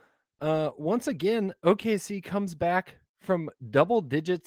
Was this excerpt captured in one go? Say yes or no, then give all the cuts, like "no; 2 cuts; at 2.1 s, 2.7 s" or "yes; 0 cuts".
yes; 0 cuts